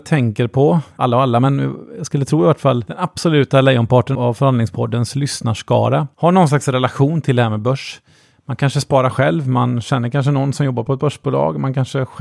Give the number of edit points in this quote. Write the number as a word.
one